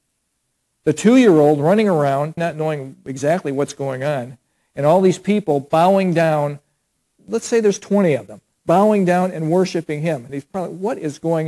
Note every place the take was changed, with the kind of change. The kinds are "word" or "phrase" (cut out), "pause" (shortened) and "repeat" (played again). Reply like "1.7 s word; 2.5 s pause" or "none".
2.4 s word